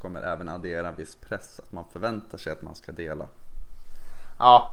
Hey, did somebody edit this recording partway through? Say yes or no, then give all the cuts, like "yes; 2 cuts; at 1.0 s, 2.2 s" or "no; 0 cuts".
no; 0 cuts